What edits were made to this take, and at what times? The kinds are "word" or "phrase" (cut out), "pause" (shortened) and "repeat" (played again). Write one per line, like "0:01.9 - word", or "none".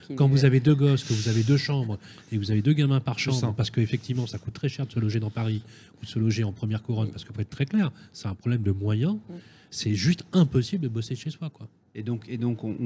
none